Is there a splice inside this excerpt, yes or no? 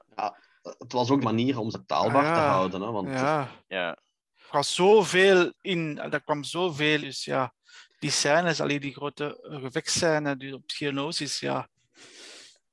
yes